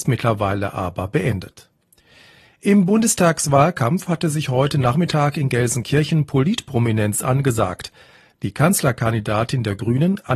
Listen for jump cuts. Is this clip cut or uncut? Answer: uncut